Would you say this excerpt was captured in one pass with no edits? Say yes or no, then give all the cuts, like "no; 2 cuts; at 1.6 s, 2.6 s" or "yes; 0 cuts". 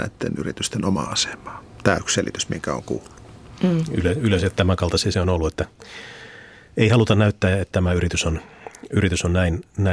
no; 3 cuts; at 2.0 s, 5.1 s, 7.7 s